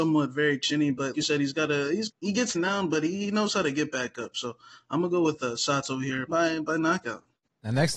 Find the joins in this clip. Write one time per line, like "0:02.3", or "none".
0:01.1
0:02.1
0:02.5
0:06.3